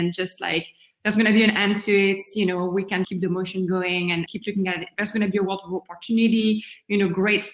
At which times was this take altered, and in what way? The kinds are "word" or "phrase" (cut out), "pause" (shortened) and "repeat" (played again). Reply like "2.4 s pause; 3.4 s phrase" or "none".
3.0 s word; 4.3 s word